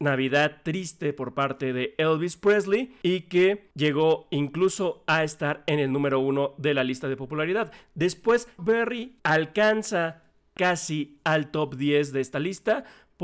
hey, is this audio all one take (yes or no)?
no